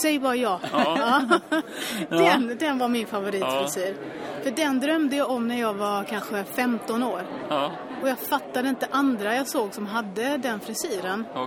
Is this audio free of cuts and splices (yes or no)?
yes